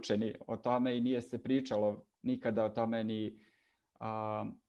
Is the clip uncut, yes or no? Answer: no